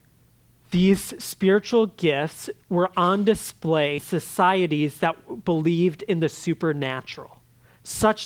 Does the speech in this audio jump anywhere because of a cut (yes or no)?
yes